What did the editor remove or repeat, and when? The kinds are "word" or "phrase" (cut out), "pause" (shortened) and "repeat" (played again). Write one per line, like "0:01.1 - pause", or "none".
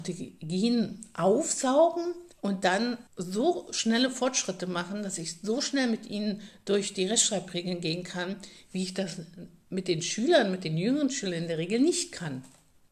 0:02.3 - pause
0:03.1 - pause